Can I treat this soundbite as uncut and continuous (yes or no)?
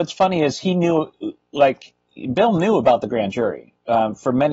yes